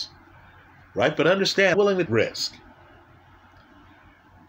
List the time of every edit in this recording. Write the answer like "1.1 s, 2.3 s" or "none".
1.7 s, 2.1 s

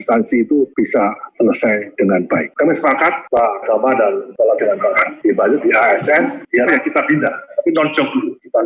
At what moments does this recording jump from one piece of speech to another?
3.6 s, 4.6 s, 5.6 s, 6.7 s

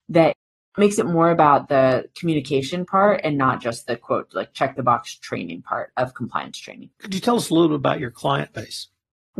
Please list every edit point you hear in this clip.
6.9 s

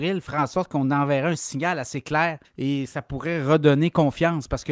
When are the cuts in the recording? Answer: 2.4 s

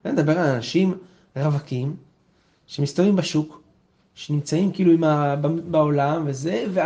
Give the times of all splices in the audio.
none

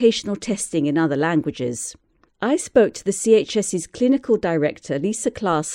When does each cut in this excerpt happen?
2.3 s

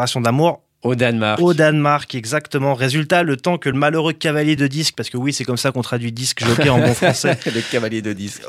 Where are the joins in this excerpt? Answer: none

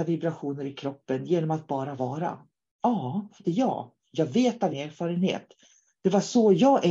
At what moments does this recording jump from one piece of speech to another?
3.4 s, 4.7 s

